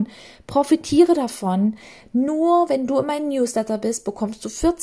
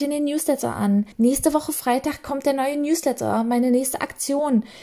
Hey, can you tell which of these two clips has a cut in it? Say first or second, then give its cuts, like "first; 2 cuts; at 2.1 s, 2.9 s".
second; 1 cut; at 1.1 s